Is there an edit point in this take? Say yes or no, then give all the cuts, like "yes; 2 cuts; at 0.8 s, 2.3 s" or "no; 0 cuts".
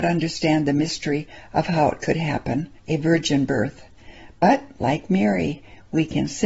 yes; 1 cut; at 2.8 s